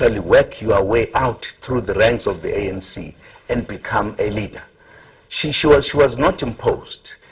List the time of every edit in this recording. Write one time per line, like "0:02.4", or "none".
none